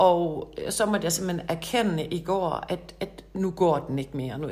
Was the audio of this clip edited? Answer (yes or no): no